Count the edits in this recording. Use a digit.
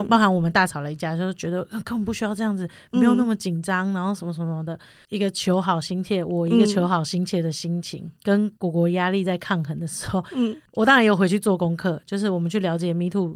0